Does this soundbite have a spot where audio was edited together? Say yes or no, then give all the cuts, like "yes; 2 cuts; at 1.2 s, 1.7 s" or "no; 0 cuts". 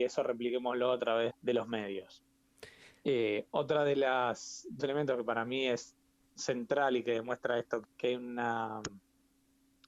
yes; 3 cuts; at 1.3 s, 4.8 s, 7.8 s